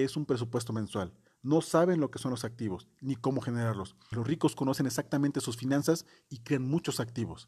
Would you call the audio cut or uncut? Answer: cut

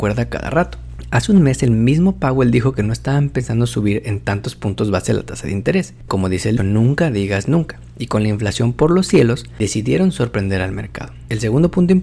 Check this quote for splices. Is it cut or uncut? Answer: cut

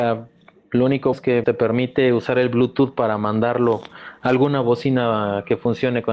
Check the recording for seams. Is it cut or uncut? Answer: cut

